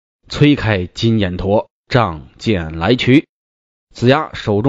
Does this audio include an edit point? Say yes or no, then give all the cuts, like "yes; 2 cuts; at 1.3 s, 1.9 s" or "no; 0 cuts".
no; 0 cuts